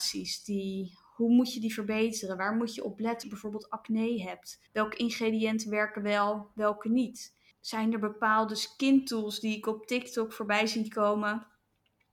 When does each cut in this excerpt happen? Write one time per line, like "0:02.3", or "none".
0:03.2
0:04.7